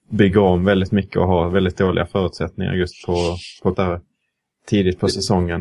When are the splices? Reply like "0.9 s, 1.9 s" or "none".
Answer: 3.7 s